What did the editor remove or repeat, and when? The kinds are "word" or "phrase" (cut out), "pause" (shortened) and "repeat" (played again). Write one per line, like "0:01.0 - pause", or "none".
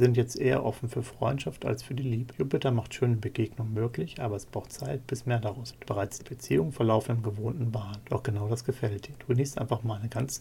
0:05.8 - word
0:06.2 - word